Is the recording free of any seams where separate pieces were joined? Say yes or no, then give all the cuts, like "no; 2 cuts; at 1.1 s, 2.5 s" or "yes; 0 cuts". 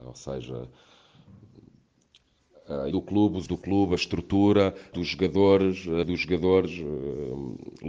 no; 4 cuts; at 2.9 s, 3.5 s, 4.9 s, 6.0 s